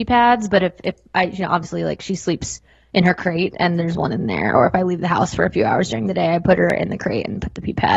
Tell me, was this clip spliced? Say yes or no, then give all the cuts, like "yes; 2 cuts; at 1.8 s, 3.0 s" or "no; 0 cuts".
no; 0 cuts